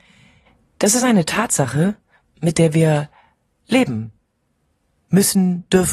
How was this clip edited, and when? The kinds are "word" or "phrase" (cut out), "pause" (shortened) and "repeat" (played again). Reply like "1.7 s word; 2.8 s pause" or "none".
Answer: none